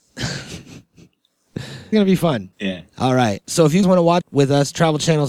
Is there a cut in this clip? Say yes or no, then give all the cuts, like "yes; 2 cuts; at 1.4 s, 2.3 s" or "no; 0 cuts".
yes; 5 cuts; at 1.9 s, 2.5 s, 3.4 s, 3.8 s, 4.2 s